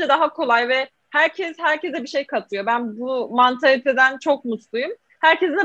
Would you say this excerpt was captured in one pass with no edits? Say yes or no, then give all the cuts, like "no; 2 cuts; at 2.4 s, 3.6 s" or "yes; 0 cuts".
yes; 0 cuts